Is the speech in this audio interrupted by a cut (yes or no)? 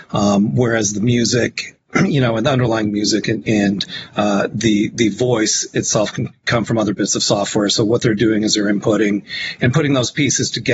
no